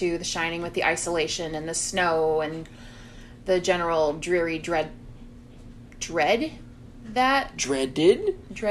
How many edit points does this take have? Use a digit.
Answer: 0